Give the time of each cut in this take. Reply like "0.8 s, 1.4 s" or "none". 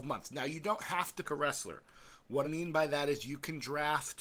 1.2 s, 2.4 s